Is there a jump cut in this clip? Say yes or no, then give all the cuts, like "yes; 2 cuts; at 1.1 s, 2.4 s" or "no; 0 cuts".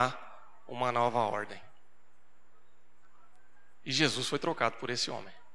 no; 0 cuts